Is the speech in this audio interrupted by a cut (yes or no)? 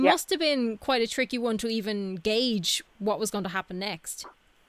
no